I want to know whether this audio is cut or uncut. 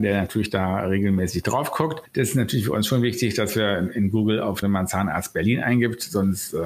cut